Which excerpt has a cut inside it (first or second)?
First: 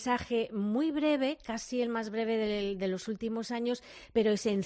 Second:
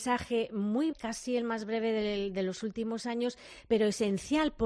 second